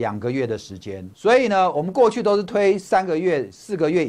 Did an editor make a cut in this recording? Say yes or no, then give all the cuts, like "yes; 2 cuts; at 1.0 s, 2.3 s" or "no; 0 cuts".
yes; 1 cut; at 1.1 s